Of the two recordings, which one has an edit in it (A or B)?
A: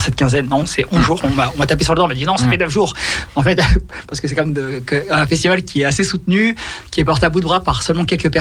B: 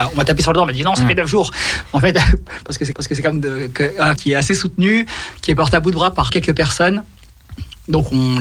B